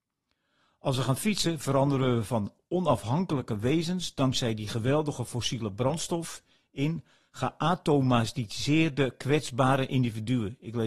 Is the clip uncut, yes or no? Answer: yes